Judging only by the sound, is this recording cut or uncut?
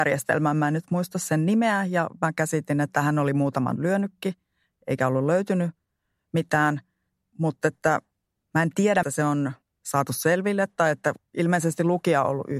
cut